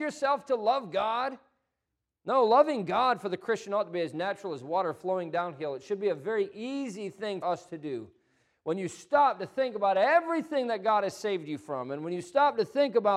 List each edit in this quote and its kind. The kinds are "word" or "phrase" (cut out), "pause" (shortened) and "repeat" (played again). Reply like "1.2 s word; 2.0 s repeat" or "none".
7.4 s word